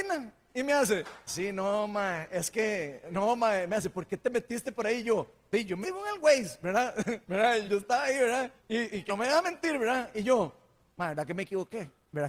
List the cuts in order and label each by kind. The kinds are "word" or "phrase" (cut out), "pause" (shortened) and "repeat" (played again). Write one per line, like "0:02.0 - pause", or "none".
0:01.3 - word
0:05.8 - word
0:07.2 - pause
0:07.6 - word
0:08.6 - pause
0:09.1 - word